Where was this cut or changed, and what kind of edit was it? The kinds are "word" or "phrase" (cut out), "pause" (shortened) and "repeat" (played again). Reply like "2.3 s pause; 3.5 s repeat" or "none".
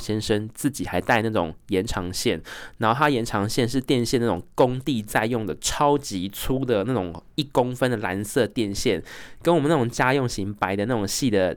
7.3 s pause